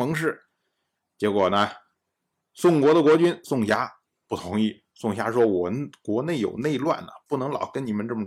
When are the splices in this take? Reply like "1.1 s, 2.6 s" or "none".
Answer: none

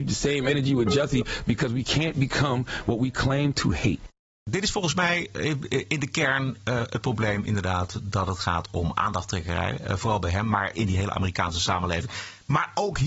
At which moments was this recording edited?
10.7 s

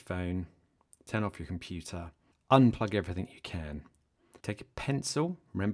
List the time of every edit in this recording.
2.3 s, 4.4 s

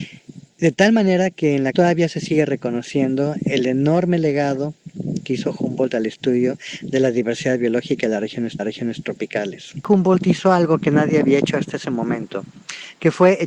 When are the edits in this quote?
1.7 s, 5.2 s, 8.6 s

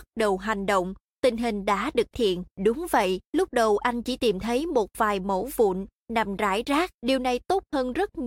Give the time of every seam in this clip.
2.1 s, 2.5 s, 3.3 s, 6.9 s

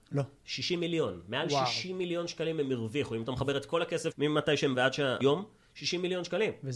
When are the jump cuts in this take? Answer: 4.1 s, 4.7 s, 5.2 s

